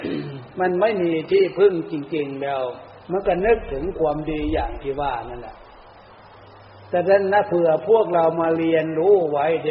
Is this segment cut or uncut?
cut